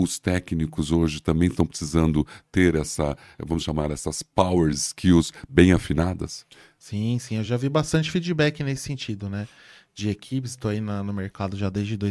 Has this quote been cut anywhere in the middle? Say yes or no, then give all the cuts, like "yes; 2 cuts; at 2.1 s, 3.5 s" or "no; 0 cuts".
no; 0 cuts